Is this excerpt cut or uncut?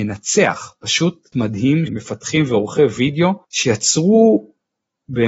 cut